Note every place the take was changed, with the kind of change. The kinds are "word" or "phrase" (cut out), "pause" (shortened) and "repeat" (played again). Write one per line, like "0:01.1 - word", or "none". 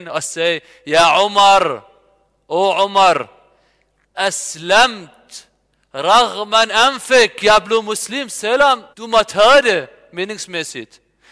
0:04.1 - word
0:06.7 - word
0:08.9 - pause